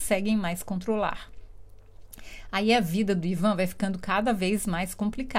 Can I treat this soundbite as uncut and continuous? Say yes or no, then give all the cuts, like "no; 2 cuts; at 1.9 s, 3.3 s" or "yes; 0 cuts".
yes; 0 cuts